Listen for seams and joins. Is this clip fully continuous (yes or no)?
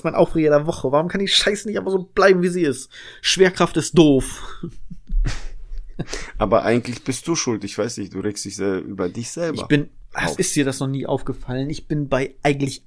yes